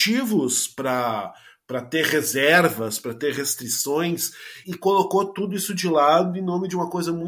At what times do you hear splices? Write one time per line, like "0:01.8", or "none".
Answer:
0:04.6